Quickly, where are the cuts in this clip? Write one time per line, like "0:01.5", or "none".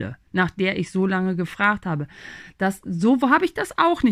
none